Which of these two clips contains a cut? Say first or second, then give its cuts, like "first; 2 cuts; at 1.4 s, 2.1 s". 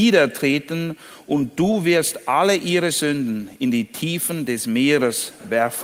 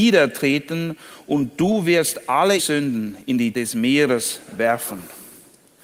second; 2 cuts; at 2.6 s, 3.5 s